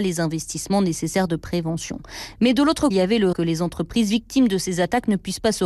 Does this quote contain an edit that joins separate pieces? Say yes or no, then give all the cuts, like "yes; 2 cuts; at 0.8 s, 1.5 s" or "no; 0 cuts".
yes; 2 cuts; at 2.9 s, 3.3 s